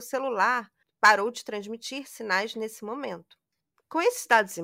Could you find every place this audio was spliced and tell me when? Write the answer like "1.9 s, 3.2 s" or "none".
none